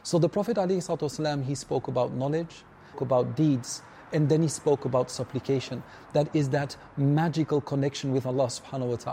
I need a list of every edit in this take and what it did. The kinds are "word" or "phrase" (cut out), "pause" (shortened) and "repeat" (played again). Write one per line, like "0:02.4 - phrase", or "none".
0:02.9 - phrase